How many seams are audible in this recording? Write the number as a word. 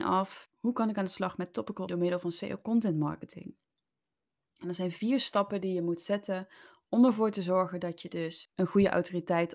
one